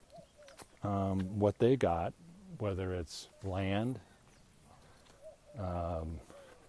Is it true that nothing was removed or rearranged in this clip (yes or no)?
no